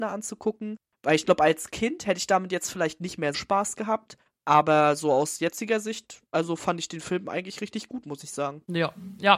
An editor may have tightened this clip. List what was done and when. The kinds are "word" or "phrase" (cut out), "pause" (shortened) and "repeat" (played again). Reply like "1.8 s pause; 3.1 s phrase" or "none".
3.3 s word; 6.3 s pause